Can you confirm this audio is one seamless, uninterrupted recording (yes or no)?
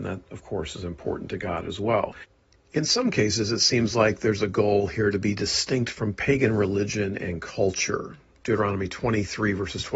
yes